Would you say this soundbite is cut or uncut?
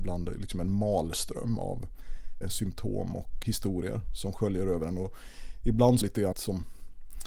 cut